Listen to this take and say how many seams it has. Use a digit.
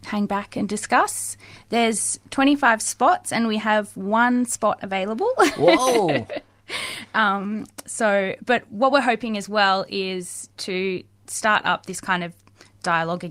0